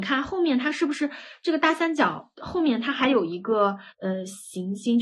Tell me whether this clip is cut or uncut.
cut